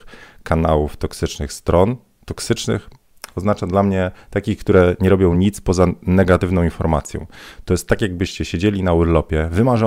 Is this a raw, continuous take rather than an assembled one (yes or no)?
yes